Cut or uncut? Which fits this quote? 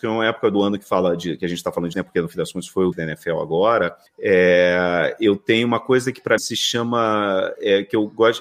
cut